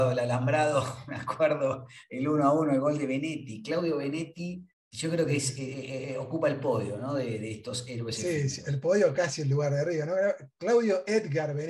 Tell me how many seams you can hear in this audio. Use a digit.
0